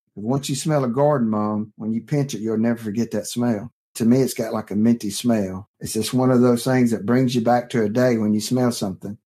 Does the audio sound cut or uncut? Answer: uncut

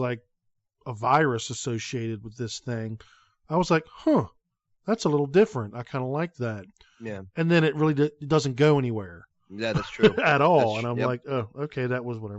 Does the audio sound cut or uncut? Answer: uncut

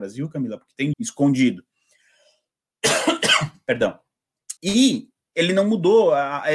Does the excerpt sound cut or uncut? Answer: cut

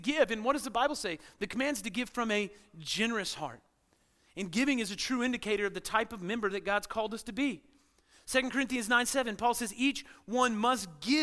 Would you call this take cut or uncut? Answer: uncut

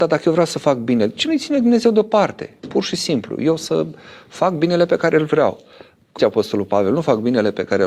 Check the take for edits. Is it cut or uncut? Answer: cut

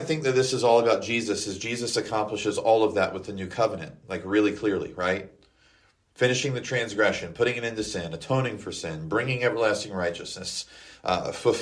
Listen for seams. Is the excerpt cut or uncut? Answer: uncut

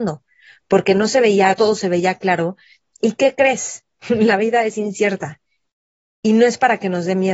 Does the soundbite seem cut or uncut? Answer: cut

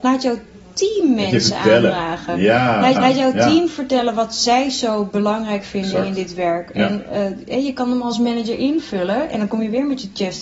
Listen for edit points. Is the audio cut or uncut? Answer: cut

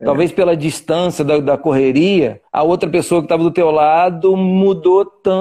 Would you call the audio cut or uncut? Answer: cut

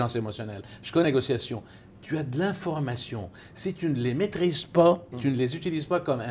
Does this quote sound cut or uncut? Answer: cut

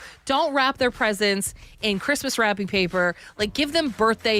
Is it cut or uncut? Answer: uncut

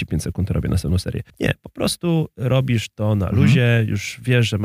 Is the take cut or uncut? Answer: cut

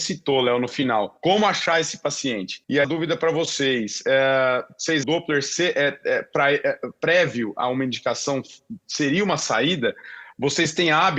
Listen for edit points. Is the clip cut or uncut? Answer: cut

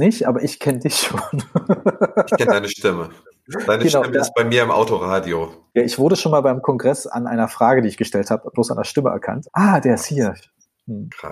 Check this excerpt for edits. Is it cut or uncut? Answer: uncut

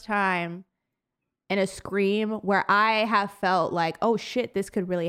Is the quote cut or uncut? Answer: uncut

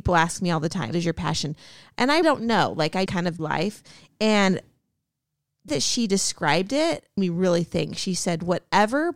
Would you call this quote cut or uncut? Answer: cut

